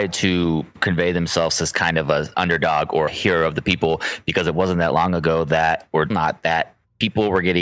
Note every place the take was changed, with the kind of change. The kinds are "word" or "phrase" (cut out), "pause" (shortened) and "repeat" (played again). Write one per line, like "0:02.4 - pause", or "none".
0:03.1 - word
0:06.1 - word